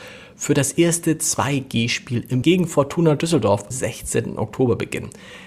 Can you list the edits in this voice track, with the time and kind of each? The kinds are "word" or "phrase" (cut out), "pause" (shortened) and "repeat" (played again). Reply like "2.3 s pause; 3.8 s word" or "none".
2.4 s word; 3.7 s word